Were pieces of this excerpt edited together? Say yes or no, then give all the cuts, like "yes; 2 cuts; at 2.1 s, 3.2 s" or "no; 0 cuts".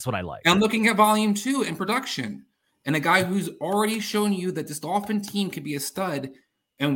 no; 0 cuts